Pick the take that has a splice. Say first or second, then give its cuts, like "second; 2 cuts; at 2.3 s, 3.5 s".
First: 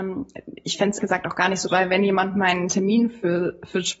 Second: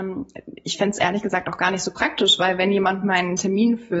first; 2 cuts; at 1.0 s, 1.7 s